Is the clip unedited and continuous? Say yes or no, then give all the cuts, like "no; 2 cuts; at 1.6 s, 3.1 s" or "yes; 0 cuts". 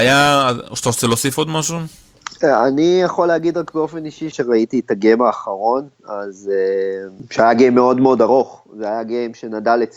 no; 1 cut; at 4.3 s